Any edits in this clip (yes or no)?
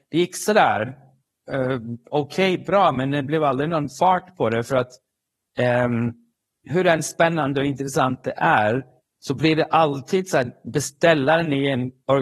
no